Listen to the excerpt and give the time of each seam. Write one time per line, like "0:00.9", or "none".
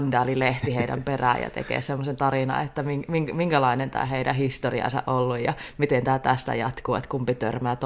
none